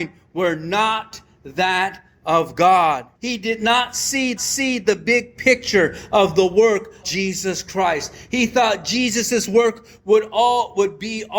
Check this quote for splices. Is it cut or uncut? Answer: cut